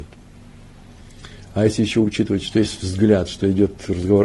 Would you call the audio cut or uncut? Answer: uncut